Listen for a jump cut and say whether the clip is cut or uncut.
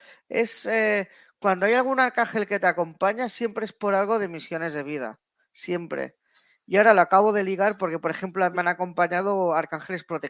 cut